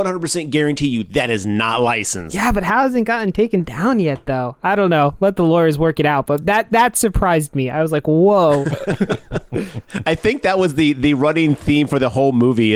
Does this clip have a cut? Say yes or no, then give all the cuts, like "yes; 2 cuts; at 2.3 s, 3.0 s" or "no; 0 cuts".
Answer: no; 0 cuts